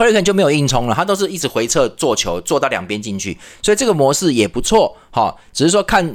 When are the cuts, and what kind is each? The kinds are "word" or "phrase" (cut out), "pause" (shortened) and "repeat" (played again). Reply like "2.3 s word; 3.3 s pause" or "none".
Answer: none